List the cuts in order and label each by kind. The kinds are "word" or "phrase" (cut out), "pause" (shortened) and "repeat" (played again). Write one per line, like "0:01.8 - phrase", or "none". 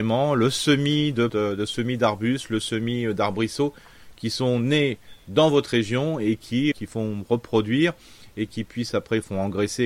0:01.3 - word
0:06.7 - word